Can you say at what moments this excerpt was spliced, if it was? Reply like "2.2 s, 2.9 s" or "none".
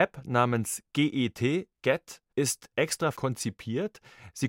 2.3 s, 3.1 s